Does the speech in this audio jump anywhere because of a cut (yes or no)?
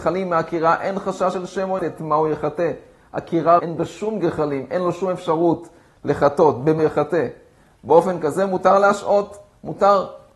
yes